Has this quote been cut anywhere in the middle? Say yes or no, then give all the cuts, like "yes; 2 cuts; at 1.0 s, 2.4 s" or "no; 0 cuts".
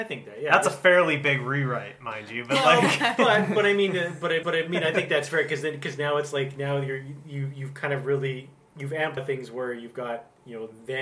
yes; 2 cuts; at 4.4 s, 9.2 s